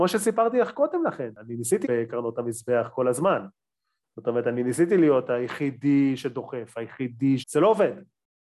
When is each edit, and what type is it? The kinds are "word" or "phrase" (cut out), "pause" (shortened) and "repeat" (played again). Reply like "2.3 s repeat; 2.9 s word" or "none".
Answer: 1.8 s word; 7.4 s word